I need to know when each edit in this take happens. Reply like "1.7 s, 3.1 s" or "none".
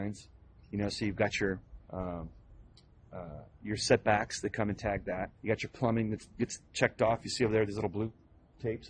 1.8 s, 3.5 s, 5.4 s, 6.6 s